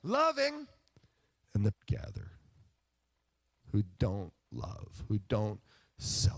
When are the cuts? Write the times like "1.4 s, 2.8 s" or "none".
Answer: 1.7 s, 4.4 s